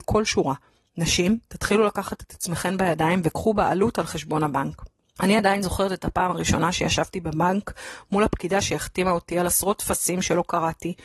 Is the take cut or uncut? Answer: uncut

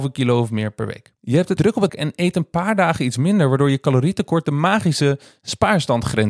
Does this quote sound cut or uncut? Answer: cut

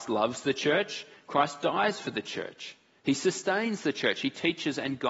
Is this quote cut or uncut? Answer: uncut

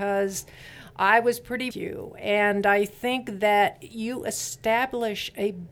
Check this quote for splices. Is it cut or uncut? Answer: cut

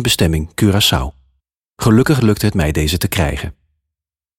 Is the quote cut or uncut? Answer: cut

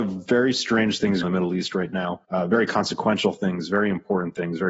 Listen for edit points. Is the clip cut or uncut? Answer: cut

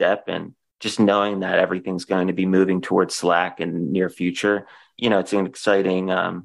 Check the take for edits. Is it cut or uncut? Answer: uncut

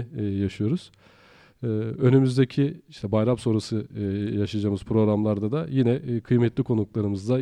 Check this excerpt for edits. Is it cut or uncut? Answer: uncut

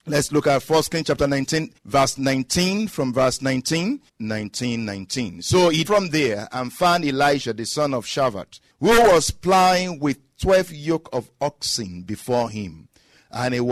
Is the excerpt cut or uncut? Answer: cut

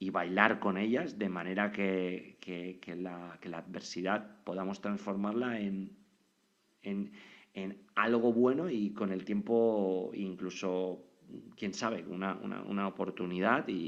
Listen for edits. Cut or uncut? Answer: uncut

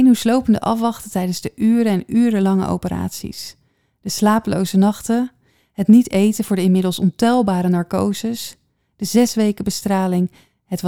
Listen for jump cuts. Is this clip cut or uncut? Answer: uncut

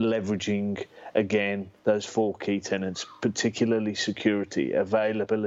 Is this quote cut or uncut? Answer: cut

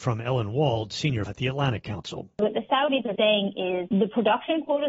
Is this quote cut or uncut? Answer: cut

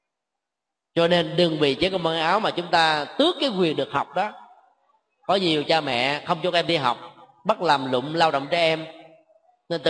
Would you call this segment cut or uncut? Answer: uncut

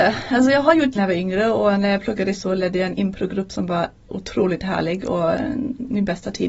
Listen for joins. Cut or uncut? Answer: cut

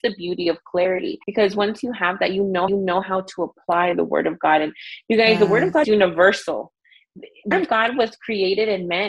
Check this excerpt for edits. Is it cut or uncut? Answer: cut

